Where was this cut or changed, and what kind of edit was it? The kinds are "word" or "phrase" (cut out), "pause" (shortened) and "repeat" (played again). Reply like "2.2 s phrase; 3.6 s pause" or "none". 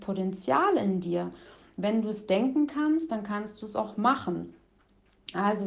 none